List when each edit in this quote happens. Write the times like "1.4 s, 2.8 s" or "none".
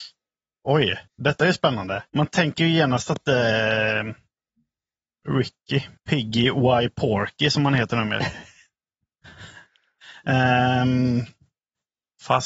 1.1 s, 2.1 s, 6.0 s